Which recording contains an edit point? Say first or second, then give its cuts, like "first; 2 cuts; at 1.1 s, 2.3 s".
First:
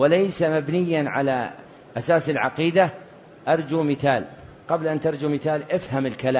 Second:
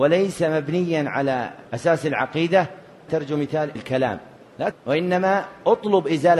second; 4 cuts; at 1.7 s, 3.1 s, 3.7 s, 4.7 s